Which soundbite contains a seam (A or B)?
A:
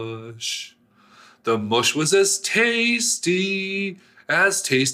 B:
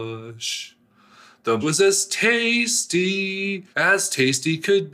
B